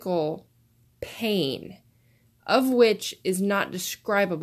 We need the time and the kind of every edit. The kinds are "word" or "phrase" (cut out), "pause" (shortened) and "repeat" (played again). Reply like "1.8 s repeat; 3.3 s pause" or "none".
none